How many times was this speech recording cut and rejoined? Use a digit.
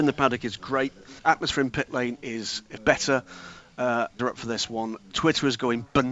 3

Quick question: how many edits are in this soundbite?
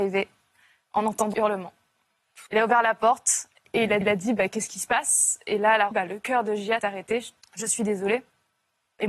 6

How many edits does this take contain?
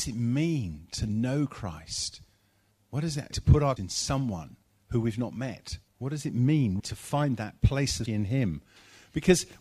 7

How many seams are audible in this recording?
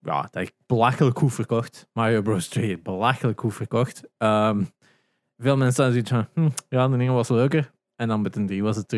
0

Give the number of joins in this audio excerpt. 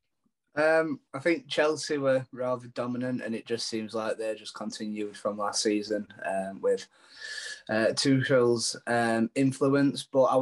1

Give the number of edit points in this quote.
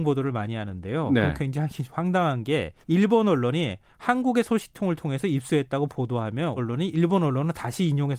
2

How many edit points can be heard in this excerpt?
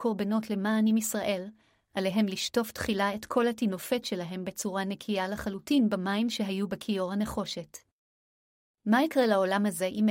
0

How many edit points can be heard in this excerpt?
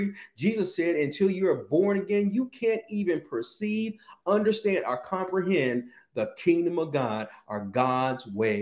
0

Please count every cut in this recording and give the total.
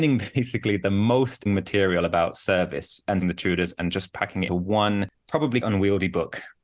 4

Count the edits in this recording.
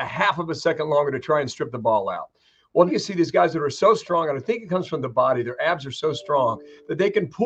2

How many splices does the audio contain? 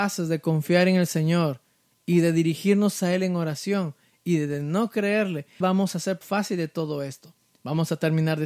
2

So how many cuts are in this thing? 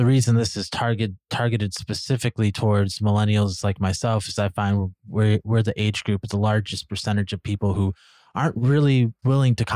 0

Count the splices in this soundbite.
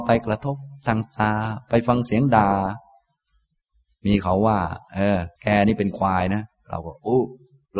1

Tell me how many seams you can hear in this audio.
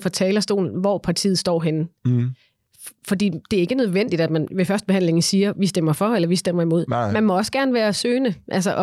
0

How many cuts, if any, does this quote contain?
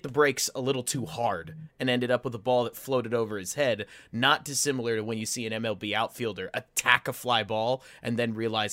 0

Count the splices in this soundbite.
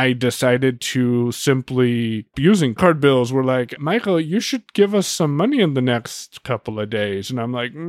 3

